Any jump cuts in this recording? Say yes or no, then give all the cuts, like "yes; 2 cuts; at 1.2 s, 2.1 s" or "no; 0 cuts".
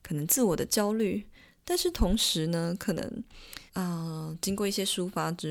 yes; 1 cut; at 3.7 s